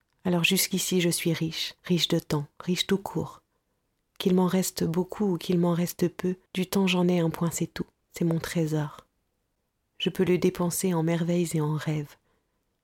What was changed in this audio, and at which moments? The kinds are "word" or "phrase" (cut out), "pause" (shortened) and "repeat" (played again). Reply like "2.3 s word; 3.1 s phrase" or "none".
1.8 s pause; 6.5 s pause; 8.0 s pause